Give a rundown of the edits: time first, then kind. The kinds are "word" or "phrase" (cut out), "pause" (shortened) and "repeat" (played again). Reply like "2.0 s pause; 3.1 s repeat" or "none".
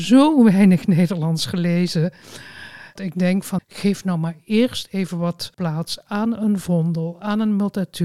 3.0 s word; 3.6 s word; 5.5 s pause